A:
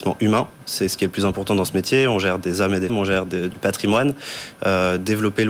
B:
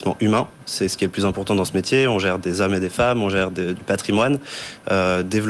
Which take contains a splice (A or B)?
A